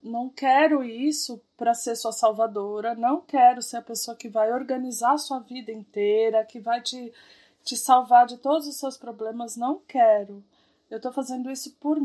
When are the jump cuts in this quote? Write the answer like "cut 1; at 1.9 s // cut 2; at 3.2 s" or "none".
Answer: none